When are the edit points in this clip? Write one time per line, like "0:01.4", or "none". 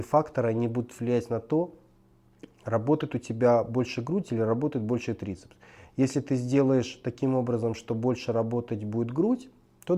none